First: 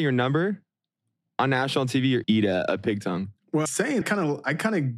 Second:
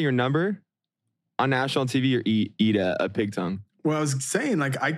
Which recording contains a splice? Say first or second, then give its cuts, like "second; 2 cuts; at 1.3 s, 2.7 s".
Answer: first; 3 cuts; at 2.2 s, 3.7 s, 4.0 s